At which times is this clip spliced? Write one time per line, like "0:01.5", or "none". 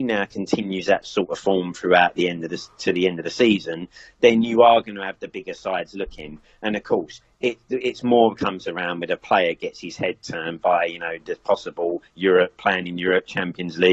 none